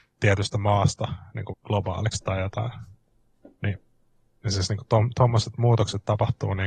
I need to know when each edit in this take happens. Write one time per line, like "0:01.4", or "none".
0:01.5
0:02.2